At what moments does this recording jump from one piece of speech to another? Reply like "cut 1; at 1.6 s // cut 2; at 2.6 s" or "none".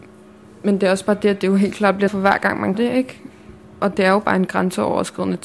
cut 1; at 2.1 s // cut 2; at 2.7 s